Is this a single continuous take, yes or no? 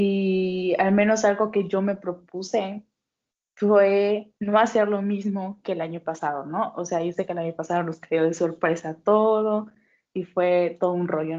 no